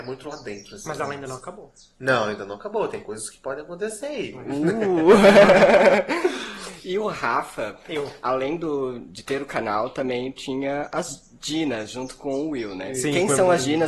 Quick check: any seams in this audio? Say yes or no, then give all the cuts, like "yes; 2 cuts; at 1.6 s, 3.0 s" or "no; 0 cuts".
no; 0 cuts